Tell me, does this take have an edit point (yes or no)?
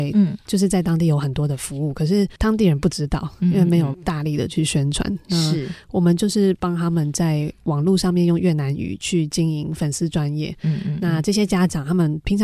yes